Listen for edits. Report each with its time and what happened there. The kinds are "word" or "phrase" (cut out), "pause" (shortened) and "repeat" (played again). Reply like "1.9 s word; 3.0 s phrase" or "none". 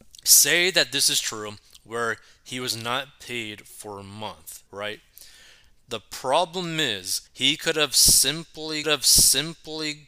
4.7 s pause; 7.3 s pause; 8.8 s repeat